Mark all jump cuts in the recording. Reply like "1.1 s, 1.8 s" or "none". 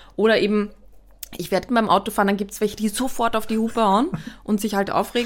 1.7 s

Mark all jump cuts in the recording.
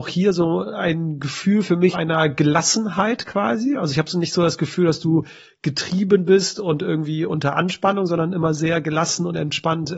1.9 s

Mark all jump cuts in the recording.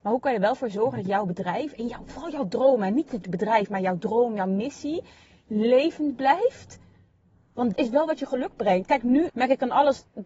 3.2 s, 7.7 s, 9.3 s

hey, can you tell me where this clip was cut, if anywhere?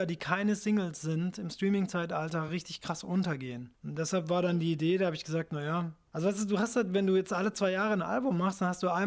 none

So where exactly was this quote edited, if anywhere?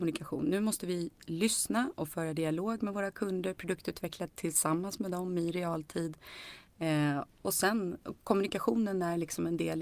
none

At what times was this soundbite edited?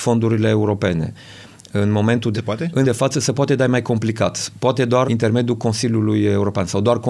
2.3 s, 2.8 s, 5.1 s

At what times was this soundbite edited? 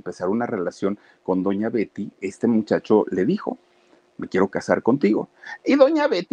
none

